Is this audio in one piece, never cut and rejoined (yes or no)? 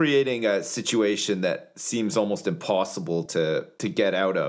yes